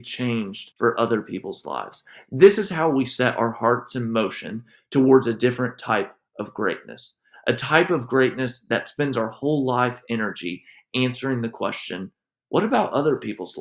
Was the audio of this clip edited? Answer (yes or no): no